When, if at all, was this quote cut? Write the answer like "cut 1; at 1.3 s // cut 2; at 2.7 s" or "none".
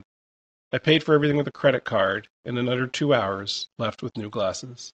none